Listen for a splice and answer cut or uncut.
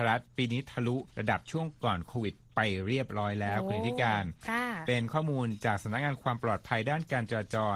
cut